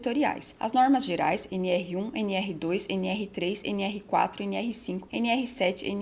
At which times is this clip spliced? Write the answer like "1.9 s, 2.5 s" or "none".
none